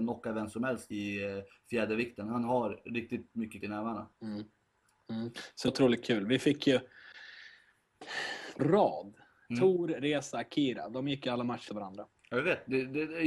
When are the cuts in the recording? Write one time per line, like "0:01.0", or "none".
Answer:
0:00.9
0:03.6
0:04.1
0:05.7
0:08.6
0:11.7